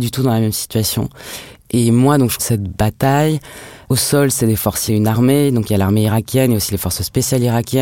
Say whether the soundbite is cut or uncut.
cut